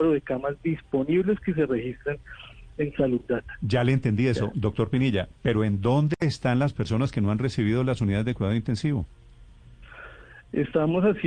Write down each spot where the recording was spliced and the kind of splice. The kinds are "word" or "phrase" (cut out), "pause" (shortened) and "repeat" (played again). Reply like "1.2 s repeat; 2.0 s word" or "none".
none